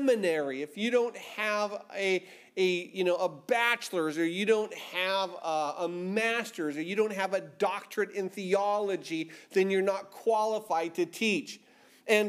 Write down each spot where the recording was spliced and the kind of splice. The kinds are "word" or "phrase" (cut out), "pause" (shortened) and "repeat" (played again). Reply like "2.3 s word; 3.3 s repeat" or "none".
none